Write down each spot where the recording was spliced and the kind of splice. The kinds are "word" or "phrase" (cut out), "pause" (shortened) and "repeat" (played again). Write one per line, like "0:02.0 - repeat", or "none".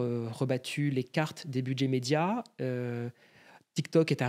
none